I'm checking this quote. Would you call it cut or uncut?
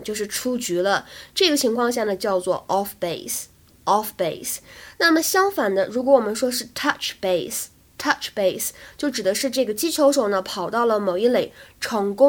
uncut